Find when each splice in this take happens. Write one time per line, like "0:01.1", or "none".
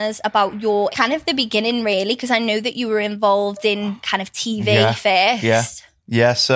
0:00.9